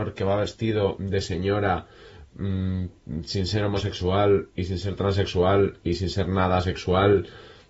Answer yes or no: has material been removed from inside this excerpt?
no